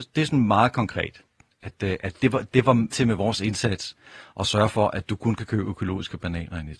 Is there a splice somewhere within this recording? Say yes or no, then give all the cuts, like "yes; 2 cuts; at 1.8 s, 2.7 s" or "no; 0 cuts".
yes; 1 cut; at 2.9 s